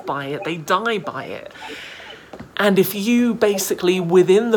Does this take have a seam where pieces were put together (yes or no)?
yes